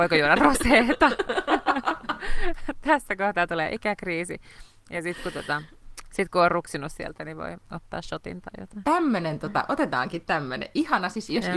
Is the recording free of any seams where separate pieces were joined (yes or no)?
yes